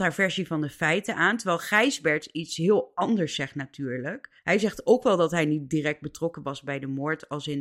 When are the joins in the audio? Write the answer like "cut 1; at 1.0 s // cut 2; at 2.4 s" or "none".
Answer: cut 1; at 4.4 s

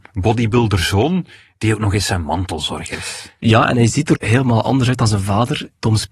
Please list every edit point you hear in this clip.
cut 1; at 4.1 s

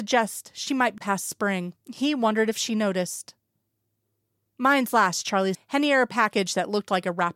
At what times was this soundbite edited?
cut 1; at 1.0 s // cut 2; at 1.8 s // cut 3; at 5.5 s

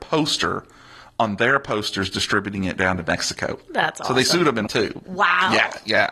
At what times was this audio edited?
cut 1; at 4.7 s

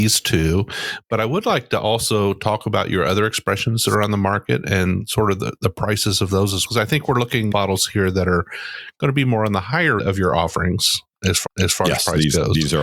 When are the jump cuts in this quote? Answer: cut 1; at 6.6 s // cut 2; at 7.5 s // cut 3; at 10.0 s // cut 4; at 11.4 s

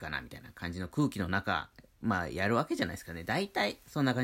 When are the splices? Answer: none

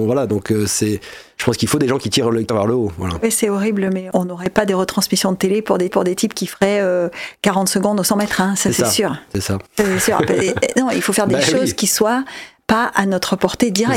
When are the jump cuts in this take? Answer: cut 1; at 2.5 s // cut 2; at 5.9 s // cut 3; at 9.7 s

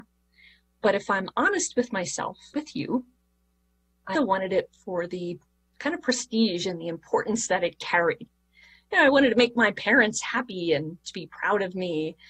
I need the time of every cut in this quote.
cut 1; at 2.5 s // cut 2; at 4.2 s

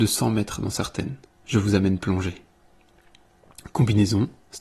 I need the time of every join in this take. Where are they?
cut 1; at 1.2 s

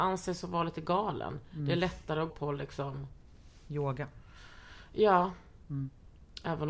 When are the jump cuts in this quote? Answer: cut 1; at 2.3 s

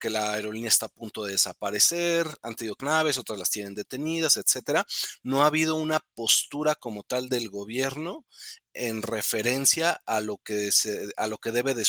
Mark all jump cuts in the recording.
cut 1; at 2.8 s

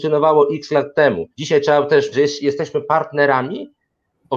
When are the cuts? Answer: cut 1; at 1.3 s // cut 2; at 2.1 s

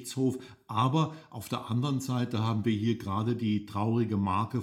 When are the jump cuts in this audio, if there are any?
none

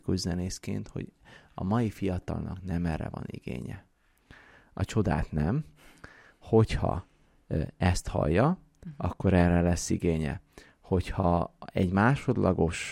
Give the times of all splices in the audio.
none

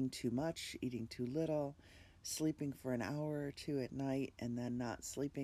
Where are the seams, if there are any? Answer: none

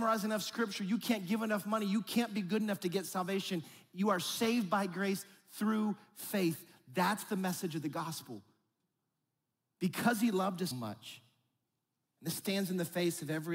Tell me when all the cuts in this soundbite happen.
cut 1; at 10.7 s

